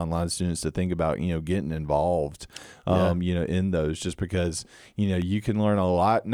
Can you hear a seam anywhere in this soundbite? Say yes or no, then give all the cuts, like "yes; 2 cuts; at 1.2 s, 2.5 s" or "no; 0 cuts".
no; 0 cuts